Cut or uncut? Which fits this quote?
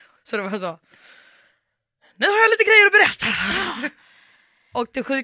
uncut